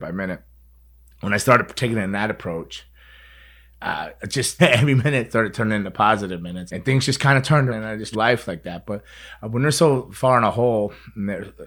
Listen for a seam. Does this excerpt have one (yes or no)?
yes